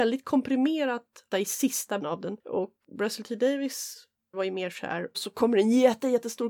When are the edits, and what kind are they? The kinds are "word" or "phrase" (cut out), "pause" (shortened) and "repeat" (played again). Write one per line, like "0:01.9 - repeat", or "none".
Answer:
0:01.3 - word
0:02.0 - word
0:02.8 - word
0:04.3 - word
0:05.1 - word